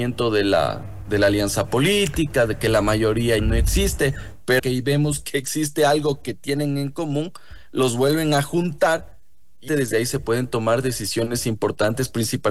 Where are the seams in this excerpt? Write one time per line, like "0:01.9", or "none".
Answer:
0:03.4
0:04.6
0:09.7